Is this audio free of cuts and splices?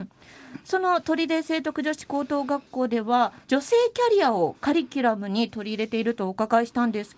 no; 1 cut; at 3.4 s

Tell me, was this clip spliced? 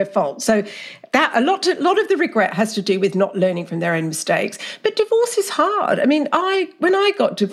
no; 0 cuts

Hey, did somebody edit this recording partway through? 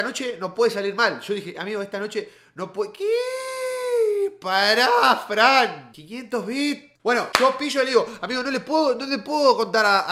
yes; 1 cut; at 7.0 s

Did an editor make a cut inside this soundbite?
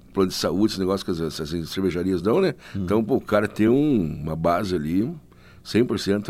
no; 0 cuts

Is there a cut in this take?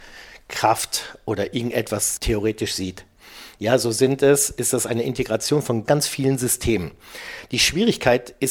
yes; 2 cuts; at 2.2 s, 5.9 s

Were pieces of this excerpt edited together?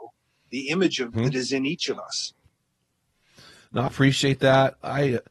yes; 2 cuts; at 1.1 s, 3.9 s

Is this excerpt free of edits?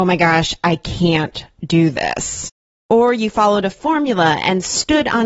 yes; 0 cuts

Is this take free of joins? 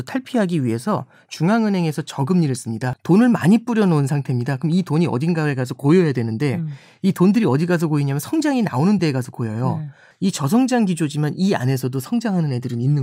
yes; 0 cuts

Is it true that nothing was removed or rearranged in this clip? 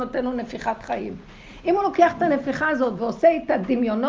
yes; 0 cuts

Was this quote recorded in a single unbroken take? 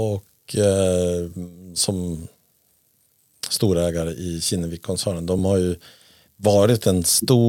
yes; 0 cuts

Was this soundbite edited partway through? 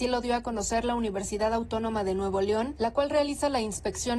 no; 0 cuts

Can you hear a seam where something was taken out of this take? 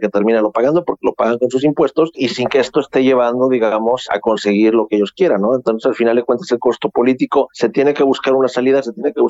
no; 0 cuts

